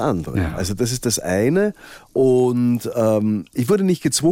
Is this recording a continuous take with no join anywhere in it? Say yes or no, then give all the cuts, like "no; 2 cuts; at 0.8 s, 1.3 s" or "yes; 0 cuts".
yes; 0 cuts